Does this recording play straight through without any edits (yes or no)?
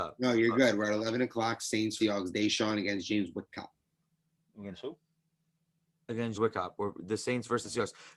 no